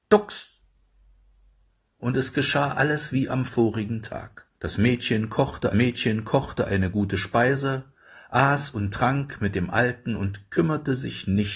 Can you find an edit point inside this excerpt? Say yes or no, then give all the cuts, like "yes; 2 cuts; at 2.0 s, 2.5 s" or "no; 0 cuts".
yes; 2 cuts; at 4.6 s, 5.7 s